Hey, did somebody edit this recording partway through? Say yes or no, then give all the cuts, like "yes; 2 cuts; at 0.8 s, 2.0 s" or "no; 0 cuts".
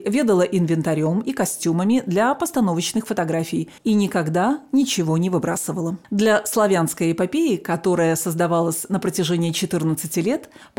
yes; 2 cuts; at 3.8 s, 6.0 s